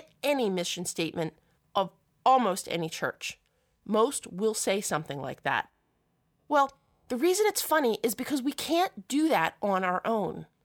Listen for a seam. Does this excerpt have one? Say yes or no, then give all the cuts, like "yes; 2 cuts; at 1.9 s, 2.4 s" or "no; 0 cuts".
no; 0 cuts